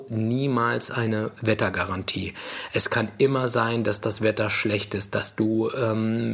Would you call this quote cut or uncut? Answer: uncut